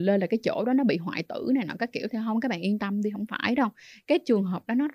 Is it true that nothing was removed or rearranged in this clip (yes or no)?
yes